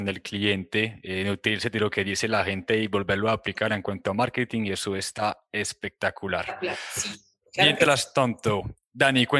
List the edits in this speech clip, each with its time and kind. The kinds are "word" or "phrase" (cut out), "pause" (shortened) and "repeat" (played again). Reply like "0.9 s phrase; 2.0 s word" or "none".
none